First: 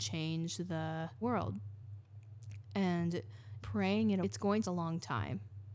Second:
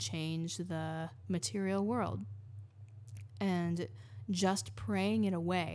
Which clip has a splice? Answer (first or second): first